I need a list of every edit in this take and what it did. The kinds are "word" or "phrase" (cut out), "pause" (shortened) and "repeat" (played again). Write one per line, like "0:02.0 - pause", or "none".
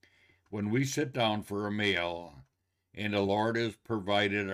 none